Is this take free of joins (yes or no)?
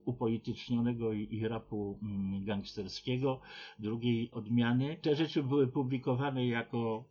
no